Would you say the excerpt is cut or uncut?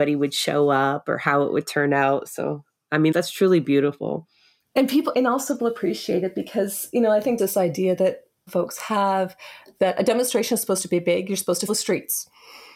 cut